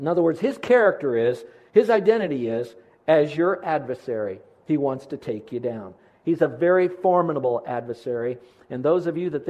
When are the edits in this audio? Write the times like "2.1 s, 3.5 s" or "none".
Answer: none